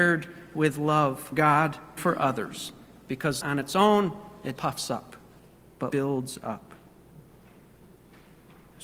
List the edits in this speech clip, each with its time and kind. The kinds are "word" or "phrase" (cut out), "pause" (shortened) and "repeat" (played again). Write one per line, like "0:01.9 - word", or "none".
0:01.3 - word
0:02.0 - word
0:03.4 - word
0:04.6 - word
0:05.9 - word